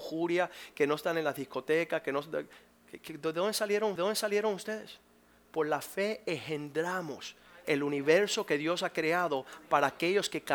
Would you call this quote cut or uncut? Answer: cut